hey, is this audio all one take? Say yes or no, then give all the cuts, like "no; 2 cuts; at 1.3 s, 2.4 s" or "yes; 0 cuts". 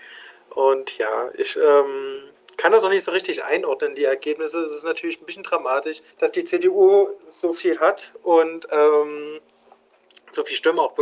no; 1 cut; at 6.1 s